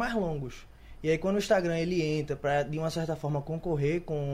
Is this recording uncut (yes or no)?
yes